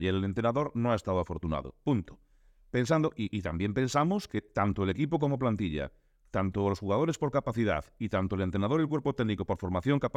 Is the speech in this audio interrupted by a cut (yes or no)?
no